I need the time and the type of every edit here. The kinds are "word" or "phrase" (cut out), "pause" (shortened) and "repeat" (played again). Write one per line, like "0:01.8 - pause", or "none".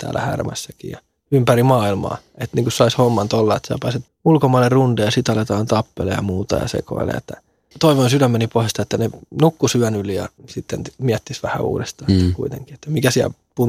0:04.1 - word
0:07.7 - word
0:10.4 - pause